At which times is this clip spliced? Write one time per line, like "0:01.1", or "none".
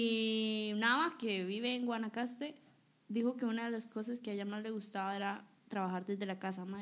none